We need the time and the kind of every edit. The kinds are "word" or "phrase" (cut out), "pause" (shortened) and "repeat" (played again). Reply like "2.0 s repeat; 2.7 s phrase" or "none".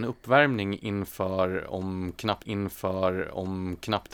2.4 s repeat